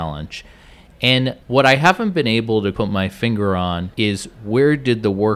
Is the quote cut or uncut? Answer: cut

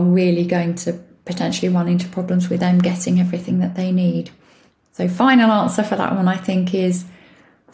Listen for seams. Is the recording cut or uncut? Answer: uncut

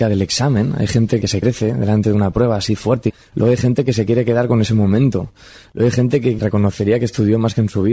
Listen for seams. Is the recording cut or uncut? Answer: uncut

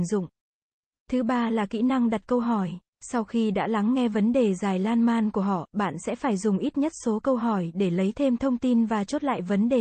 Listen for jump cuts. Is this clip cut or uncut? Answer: cut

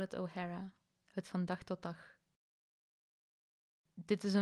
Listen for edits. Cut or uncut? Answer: cut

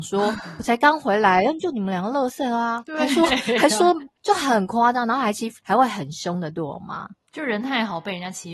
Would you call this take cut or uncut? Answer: cut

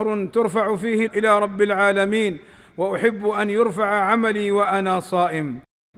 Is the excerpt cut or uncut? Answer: cut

